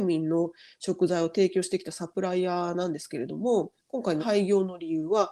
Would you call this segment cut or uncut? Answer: cut